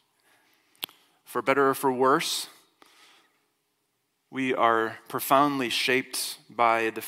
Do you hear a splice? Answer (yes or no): no